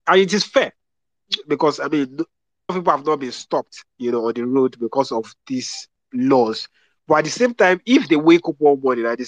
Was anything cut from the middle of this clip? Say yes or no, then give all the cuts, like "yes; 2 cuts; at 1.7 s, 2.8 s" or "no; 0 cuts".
yes; 3 cuts; at 2.7 s, 3.9 s, 6.0 s